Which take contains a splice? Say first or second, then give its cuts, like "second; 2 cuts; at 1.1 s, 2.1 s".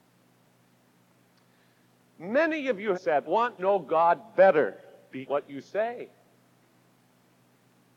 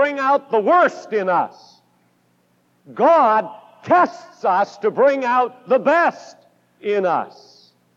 first; 4 cuts; at 2.9 s, 3.3 s, 3.6 s, 5.3 s